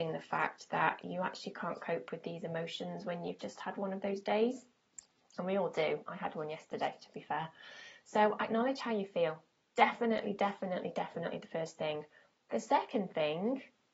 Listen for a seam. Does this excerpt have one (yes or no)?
no